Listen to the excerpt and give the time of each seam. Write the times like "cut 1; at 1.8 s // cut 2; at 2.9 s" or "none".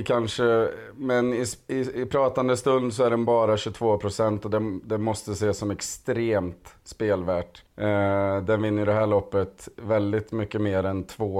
cut 1; at 7.7 s